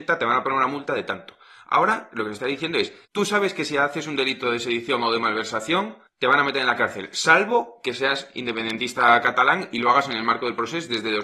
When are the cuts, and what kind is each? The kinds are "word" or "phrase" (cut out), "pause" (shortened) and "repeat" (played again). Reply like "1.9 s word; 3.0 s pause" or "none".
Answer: 3.0 s pause; 6.1 s pause